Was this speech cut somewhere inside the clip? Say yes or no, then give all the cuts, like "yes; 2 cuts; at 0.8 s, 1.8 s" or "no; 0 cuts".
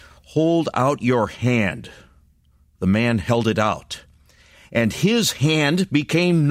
no; 0 cuts